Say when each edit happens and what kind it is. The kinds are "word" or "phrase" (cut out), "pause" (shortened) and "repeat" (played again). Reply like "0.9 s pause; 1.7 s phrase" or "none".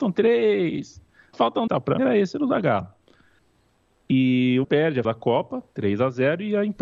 1.3 s word; 1.7 s word; 2.0 s word; 4.6 s word; 5.0 s word